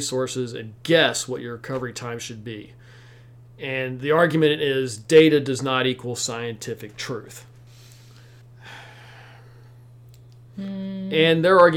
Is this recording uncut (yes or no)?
yes